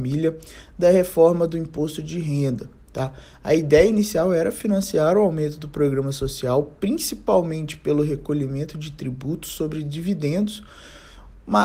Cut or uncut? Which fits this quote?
uncut